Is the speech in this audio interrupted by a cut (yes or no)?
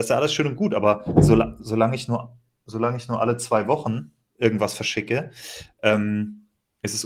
no